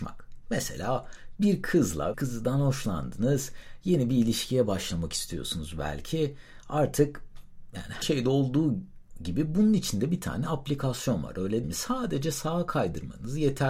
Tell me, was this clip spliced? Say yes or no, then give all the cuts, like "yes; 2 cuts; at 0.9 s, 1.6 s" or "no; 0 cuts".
yes; 3 cuts; at 2.1 s, 8.0 s, 11.6 s